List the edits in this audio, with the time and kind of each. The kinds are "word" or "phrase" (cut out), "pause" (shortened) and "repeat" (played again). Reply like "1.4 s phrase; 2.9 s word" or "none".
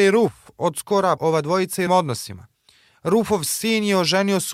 1.2 s word; 1.9 s word